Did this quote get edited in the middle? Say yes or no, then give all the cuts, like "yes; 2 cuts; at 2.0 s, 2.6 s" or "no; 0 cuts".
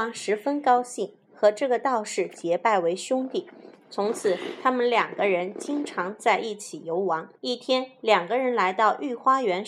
yes; 1 cut; at 7.4 s